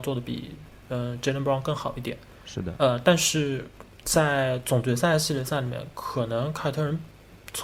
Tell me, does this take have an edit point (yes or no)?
yes